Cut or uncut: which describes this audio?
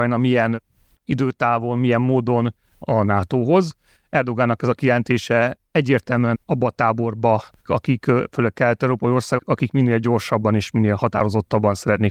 cut